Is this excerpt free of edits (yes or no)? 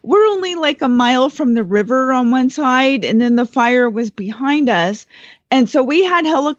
yes